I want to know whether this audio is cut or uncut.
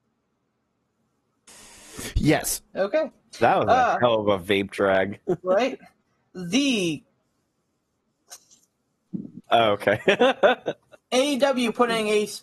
cut